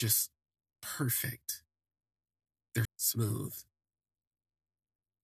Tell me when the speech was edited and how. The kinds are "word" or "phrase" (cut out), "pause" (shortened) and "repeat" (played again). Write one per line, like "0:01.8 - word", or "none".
0:02.8 - word